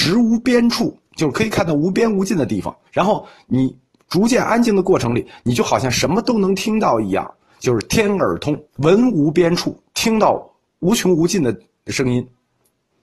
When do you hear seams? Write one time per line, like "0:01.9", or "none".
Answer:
0:02.9
0:08.7